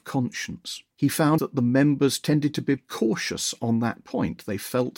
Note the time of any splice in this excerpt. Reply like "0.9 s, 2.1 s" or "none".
0.9 s, 1.4 s, 2.8 s